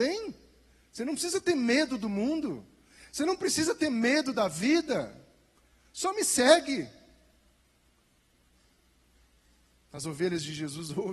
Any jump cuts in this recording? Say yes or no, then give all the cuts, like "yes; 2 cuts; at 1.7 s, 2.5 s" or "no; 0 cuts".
no; 0 cuts